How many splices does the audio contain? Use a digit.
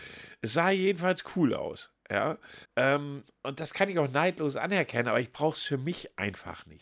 1